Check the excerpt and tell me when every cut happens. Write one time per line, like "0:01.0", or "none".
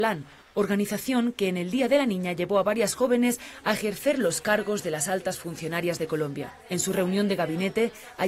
0:06.6